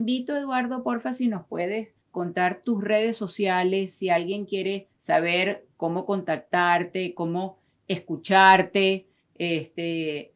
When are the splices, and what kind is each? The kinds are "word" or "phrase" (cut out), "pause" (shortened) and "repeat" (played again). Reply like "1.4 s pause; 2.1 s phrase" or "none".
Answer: 2.0 s pause; 4.9 s pause; 7.2 s phrase